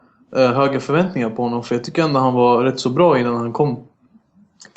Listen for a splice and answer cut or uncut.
uncut